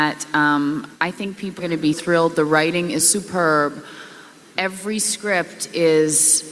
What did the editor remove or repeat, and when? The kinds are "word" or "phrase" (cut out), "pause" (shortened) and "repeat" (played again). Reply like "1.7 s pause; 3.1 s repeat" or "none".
0.9 s pause; 1.6 s word; 1.9 s word; 3.0 s word

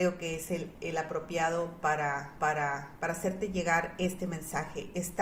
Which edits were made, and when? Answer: 2.4 s repeat

